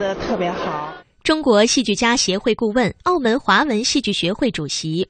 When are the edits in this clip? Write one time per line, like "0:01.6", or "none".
0:03.0